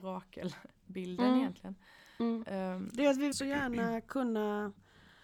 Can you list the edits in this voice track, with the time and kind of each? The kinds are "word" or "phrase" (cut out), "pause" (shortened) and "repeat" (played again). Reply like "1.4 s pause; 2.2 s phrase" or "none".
3.3 s word